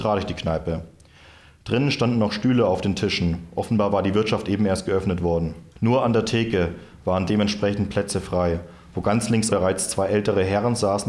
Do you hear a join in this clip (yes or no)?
yes